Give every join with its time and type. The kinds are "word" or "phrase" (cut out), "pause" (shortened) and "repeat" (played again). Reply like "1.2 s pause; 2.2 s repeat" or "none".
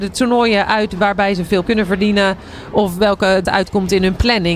1.6 s word; 3.4 s word